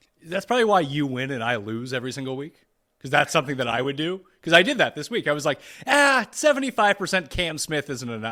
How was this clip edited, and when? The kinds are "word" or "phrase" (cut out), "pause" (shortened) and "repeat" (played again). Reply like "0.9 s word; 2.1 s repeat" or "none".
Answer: none

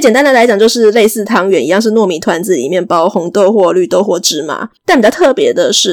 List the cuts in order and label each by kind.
4.8 s pause

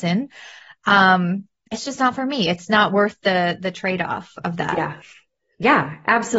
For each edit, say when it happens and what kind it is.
none

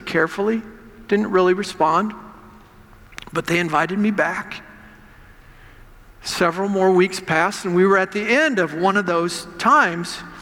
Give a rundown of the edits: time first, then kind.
none

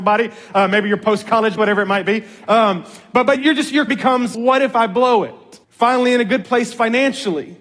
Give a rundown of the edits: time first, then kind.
1.6 s word; 3.4 s word; 3.9 s word; 4.3 s word; 5.6 s pause

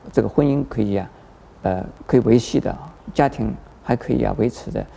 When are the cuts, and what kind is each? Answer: 2.0 s pause; 3.0 s pause

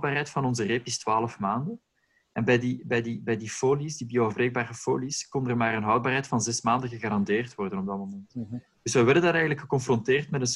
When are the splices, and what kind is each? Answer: none

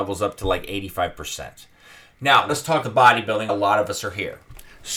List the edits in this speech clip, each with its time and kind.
2.5 s word; 2.8 s word; 3.5 s word

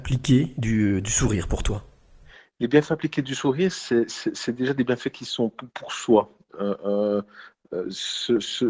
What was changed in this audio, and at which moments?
none

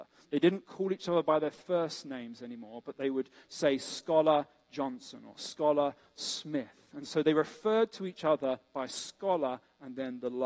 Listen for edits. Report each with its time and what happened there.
none

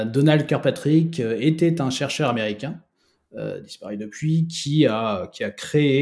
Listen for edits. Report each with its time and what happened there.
none

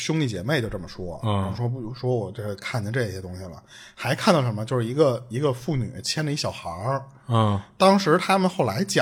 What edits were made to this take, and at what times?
none

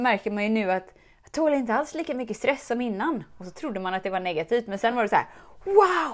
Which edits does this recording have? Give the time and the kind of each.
none

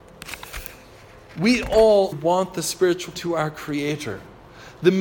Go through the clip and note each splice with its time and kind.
2.1 s word; 3.2 s word

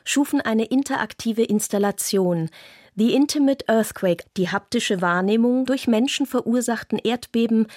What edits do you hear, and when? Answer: 4.2 s word; 5.7 s word

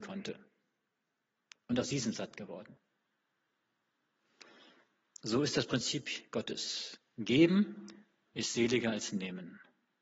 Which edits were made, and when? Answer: none

